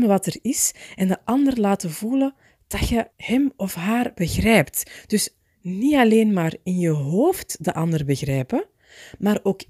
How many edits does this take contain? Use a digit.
1